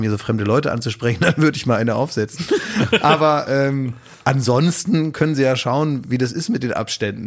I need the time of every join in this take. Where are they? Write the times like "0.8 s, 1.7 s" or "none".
none